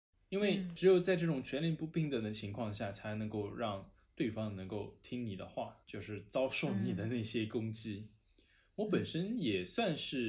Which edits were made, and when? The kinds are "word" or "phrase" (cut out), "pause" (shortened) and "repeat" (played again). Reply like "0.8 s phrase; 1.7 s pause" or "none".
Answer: 5.8 s pause